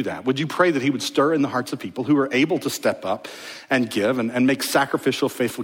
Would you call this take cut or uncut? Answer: uncut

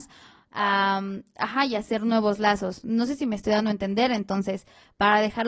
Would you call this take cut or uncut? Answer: uncut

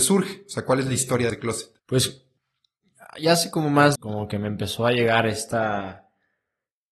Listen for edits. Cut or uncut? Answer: cut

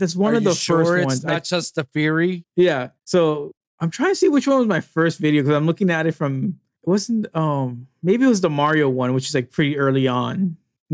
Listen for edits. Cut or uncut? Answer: cut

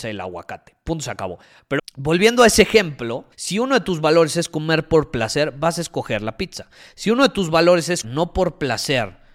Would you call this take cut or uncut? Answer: cut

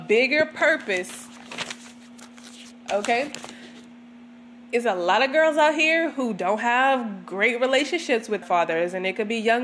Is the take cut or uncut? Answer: cut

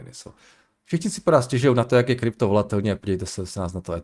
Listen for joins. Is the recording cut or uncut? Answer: uncut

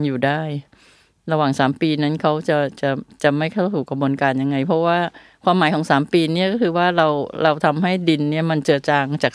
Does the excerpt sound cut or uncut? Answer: uncut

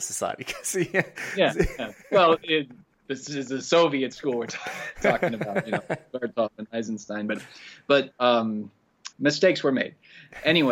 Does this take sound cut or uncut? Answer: cut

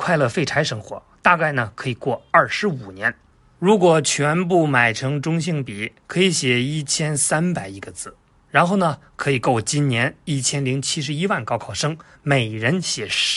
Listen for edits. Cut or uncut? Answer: uncut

